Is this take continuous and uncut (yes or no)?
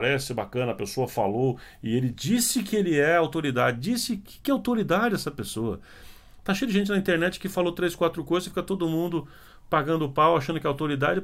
yes